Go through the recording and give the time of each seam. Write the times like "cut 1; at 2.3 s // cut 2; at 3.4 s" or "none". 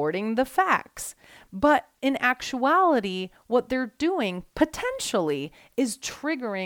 none